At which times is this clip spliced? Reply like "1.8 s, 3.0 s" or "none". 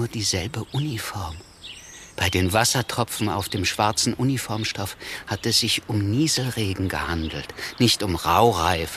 2.1 s